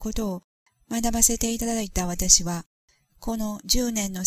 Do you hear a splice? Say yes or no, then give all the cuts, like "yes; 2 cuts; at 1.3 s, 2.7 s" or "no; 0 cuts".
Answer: no; 0 cuts